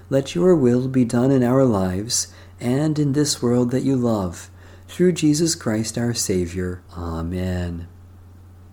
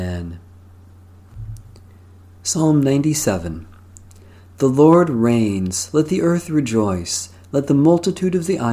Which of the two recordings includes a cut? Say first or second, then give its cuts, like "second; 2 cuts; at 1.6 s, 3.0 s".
first; 1 cut; at 6.9 s